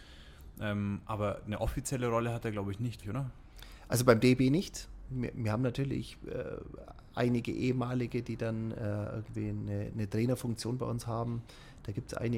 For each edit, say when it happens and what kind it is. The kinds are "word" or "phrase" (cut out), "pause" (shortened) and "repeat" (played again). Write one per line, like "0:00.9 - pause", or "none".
0:03.0 - word